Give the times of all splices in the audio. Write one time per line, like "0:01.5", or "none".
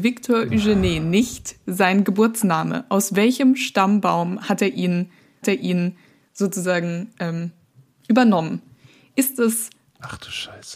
0:05.4